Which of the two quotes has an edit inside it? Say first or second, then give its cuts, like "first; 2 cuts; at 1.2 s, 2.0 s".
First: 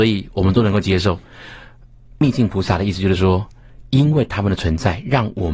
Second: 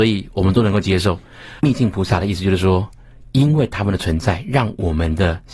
second; 1 cut; at 1.6 s